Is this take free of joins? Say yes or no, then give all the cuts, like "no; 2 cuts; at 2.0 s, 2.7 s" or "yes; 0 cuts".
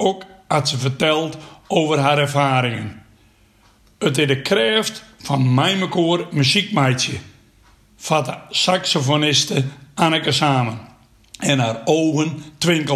yes; 0 cuts